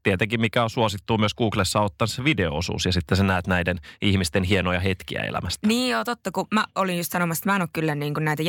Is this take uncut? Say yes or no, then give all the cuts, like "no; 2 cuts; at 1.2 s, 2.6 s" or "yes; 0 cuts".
no; 1 cut; at 6.7 s